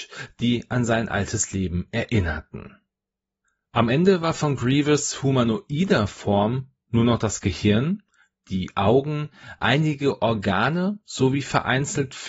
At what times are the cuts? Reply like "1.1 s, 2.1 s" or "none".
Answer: none